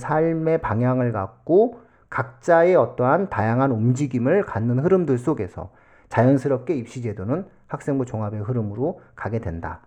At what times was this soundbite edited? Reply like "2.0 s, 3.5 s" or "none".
none